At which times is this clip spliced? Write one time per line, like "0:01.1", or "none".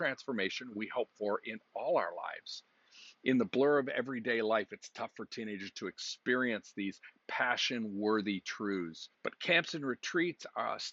0:09.1